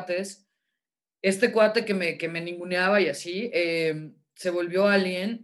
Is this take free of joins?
yes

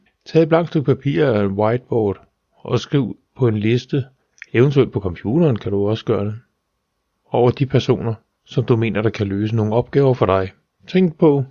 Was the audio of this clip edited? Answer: no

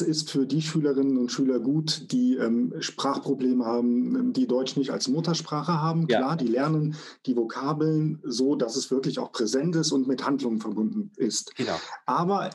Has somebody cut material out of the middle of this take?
no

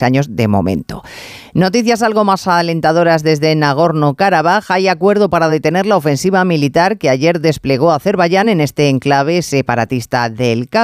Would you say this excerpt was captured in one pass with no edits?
yes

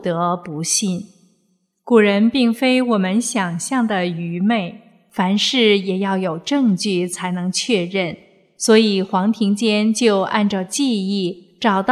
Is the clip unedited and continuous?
yes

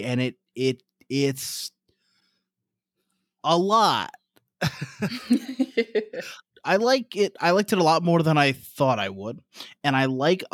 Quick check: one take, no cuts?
yes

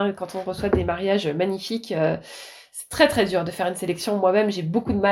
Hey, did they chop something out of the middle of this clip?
no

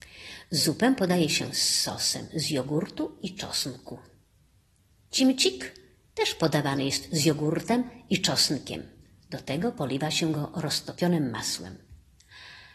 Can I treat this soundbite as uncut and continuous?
yes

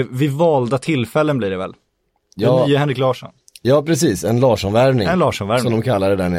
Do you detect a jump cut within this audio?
no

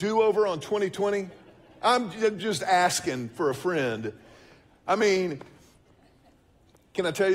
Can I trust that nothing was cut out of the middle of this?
yes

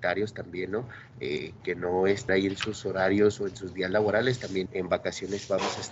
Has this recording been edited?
yes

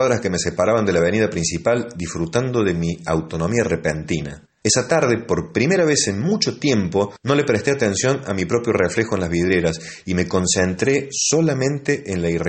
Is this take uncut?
yes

